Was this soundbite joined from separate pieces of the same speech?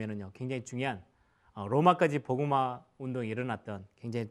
no; 0 cuts

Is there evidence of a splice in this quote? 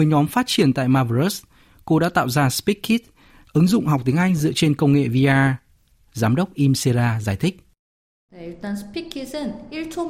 no; 0 cuts

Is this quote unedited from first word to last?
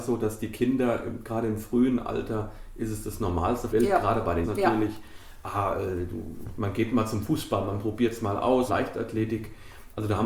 no; 3 cuts; at 3.7 s, 4.4 s, 8.7 s

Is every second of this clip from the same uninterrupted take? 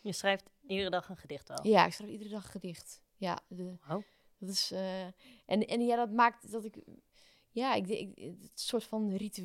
yes; 0 cuts

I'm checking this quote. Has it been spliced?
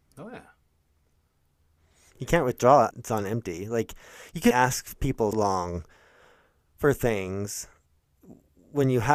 yes; 3 cuts; at 2.9 s, 4.5 s, 5.3 s

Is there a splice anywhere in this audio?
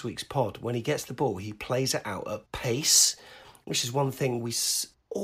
no; 0 cuts

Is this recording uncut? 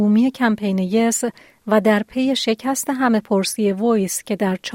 yes; 0 cuts

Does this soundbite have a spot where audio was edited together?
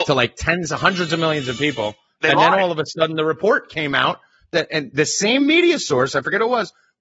no; 0 cuts

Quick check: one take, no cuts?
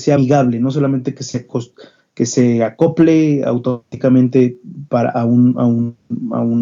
yes; 0 cuts

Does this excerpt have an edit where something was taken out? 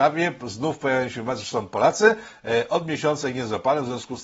no; 0 cuts

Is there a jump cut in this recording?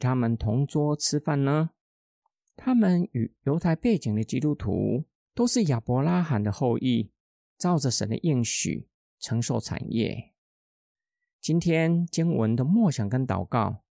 no; 0 cuts

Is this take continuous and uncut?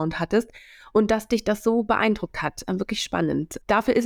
yes; 0 cuts

